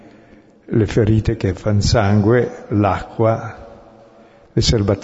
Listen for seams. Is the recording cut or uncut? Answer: uncut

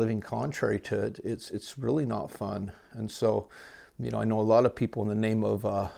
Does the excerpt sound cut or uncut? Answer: uncut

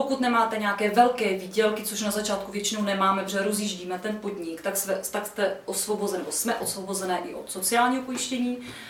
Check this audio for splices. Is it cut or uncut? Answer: uncut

